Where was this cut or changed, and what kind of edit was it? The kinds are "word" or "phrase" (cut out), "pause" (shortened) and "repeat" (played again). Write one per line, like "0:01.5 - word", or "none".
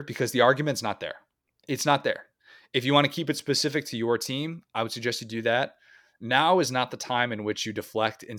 none